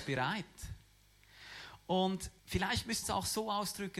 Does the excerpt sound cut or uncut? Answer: cut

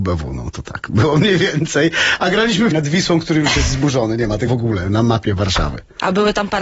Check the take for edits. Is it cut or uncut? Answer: cut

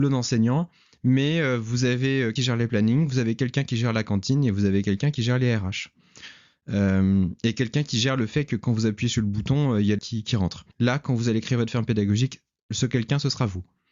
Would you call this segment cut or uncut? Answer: cut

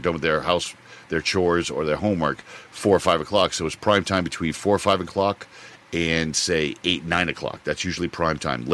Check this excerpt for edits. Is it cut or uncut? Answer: uncut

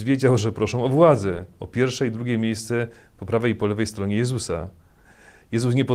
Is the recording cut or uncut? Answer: uncut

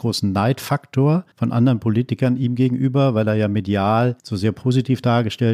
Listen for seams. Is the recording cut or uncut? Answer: cut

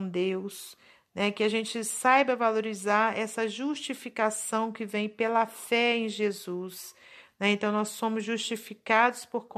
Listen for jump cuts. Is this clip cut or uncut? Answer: uncut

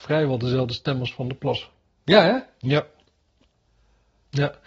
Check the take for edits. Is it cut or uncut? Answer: uncut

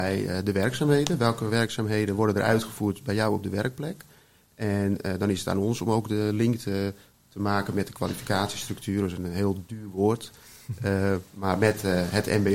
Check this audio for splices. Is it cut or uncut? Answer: uncut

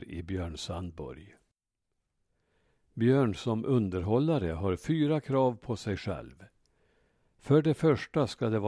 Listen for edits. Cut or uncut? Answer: uncut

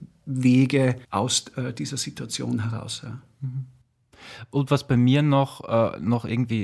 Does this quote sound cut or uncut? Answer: cut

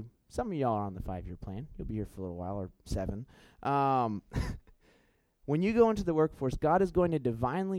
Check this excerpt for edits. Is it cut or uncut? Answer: uncut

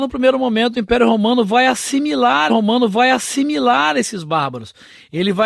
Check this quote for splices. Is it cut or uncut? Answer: cut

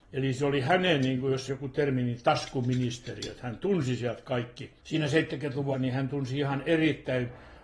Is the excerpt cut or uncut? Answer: cut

